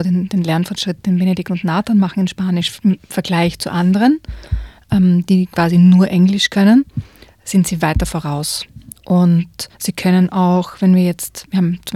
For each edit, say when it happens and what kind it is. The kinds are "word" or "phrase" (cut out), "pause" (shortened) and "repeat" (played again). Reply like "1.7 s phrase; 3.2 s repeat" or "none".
9.7 s pause